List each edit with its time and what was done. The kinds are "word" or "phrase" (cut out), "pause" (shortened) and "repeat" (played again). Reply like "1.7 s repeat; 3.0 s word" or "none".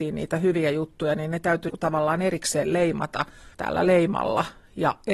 1.7 s word; 3.5 s pause